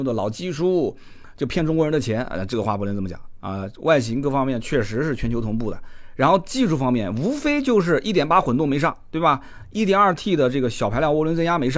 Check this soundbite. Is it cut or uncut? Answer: uncut